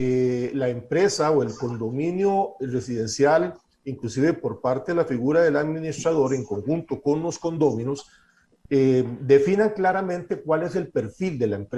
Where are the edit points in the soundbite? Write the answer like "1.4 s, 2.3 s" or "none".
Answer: none